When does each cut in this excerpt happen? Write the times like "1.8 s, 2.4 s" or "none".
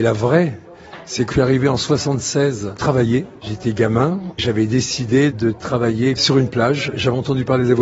1.3 s, 2.8 s, 4.4 s